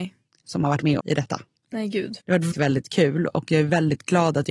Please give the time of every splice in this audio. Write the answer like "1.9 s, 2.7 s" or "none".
1.0 s, 2.2 s, 2.5 s